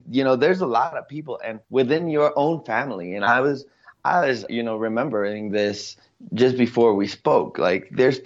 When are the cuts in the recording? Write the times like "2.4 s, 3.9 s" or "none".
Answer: 1.6 s, 4.5 s